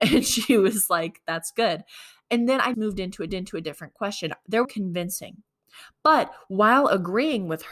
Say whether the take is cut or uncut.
cut